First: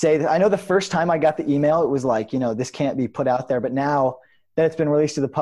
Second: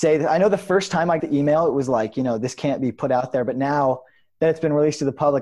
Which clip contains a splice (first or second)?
second